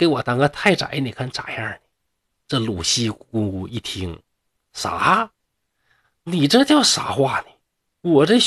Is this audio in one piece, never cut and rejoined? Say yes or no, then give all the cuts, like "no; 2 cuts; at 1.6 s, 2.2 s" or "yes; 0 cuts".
yes; 0 cuts